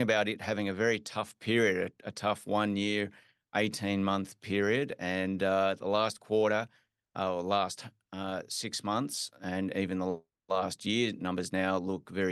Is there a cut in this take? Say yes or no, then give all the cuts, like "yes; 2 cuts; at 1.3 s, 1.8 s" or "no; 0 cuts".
no; 0 cuts